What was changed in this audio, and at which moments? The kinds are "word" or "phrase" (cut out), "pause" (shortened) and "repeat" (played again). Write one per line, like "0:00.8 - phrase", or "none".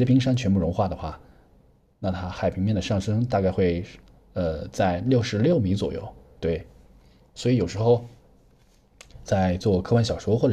0:09.3 - word